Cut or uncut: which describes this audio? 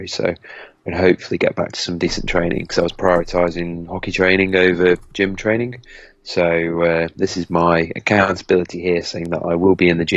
uncut